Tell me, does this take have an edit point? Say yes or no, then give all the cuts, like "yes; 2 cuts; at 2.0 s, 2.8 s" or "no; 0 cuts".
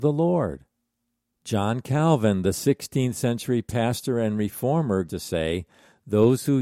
yes; 1 cut; at 5.1 s